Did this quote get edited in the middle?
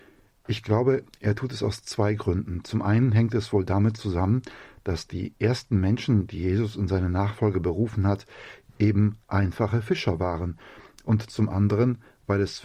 no; 0 cuts

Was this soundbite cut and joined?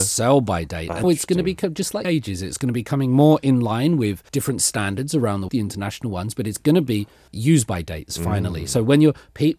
yes; 5 cuts; at 1.0 s, 2.0 s, 4.3 s, 5.5 s, 7.3 s

